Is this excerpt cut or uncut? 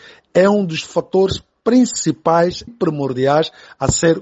cut